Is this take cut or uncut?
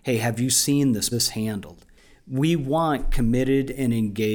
cut